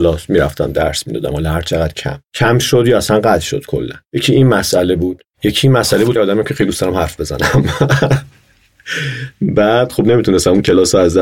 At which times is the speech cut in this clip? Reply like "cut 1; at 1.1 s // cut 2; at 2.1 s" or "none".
cut 1; at 6.2 s